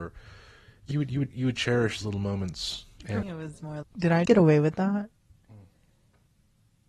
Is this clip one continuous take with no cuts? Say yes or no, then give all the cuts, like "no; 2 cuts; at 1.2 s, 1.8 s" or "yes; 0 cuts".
no; 6 cuts; at 0.9 s, 1.3 s, 2.0 s, 3.2 s, 3.8 s, 4.3 s